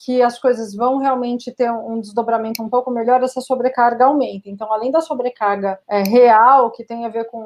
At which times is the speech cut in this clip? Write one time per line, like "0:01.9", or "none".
0:05.8

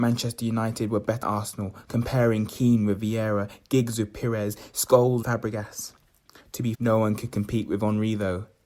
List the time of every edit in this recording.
0:01.2
0:05.2
0:06.7

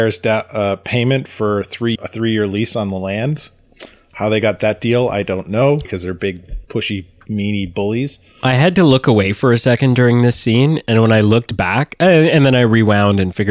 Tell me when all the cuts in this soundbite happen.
0:01.9
0:05.8
0:06.6

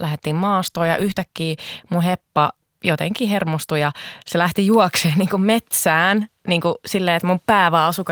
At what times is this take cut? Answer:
none

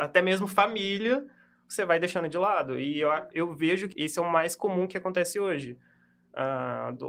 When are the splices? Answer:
0:03.9

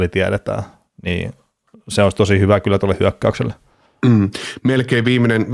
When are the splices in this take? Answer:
none

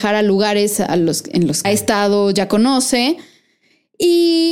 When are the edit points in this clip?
0:01.6

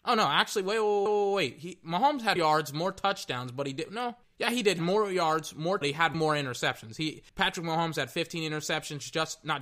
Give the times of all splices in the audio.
0:01.1
0:02.4
0:04.2
0:04.8
0:05.8
0:06.1
0:07.3

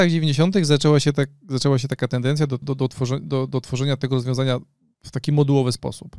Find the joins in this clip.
0:02.6

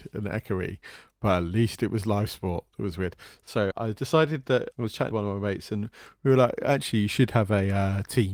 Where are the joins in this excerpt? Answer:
0:03.7
0:04.7
0:05.1

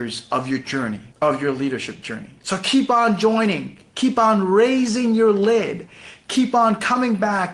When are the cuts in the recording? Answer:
0:01.1
0:02.4

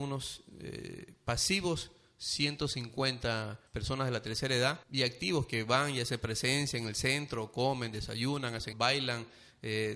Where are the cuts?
0:03.7
0:04.8
0:08.7

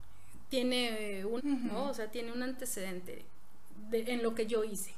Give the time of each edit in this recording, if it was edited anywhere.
0:01.4

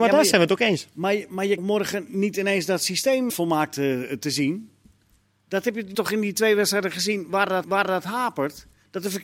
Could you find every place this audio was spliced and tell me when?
0:01.6
0:03.3
0:05.9
0:07.6

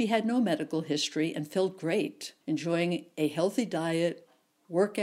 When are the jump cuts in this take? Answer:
0:02.4

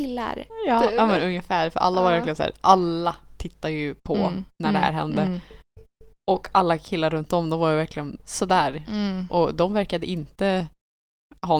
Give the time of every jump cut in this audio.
0:08.2

